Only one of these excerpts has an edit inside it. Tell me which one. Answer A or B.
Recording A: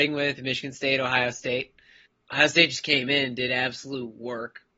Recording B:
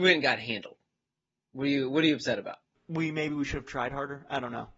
A